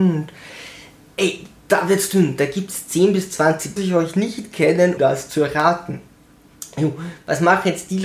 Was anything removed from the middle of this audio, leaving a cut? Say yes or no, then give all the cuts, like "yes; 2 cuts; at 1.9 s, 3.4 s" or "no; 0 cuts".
yes; 2 cuts; at 3.8 s, 5.0 s